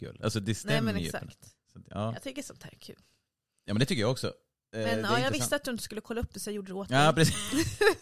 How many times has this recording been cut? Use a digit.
0